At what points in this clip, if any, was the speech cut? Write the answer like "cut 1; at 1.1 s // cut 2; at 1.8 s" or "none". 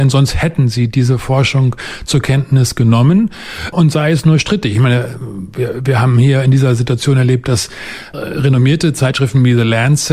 cut 1; at 8.1 s